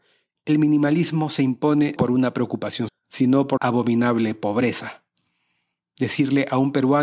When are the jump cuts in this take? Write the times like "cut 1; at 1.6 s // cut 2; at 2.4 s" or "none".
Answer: cut 1; at 2.0 s // cut 2; at 2.9 s // cut 3; at 3.6 s